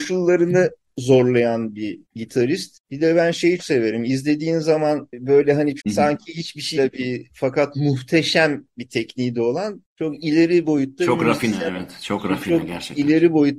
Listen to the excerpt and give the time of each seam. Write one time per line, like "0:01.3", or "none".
0:03.6
0:05.8
0:06.8